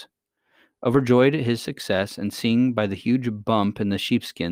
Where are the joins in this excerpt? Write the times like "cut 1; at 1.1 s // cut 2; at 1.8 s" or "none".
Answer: none